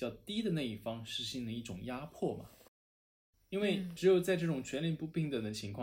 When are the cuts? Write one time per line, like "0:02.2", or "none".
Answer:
none